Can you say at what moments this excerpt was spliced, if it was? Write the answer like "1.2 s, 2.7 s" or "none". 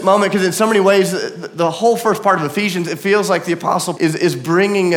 3.9 s